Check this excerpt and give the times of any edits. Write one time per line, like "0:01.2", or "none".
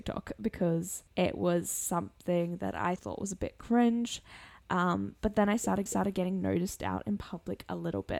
0:01.1
0:03.0
0:05.9